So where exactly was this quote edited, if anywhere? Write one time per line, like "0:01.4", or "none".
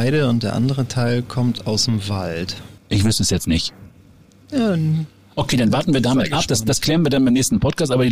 0:02.8